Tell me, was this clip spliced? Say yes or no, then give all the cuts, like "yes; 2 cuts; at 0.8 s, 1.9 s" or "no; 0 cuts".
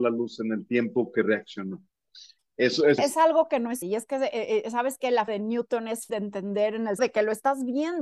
yes; 5 cuts; at 3.0 s, 3.8 s, 5.3 s, 6.1 s, 7.0 s